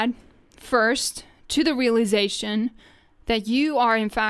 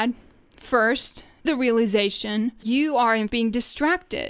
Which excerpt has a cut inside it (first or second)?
second